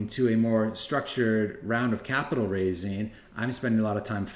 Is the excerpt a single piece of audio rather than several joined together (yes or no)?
yes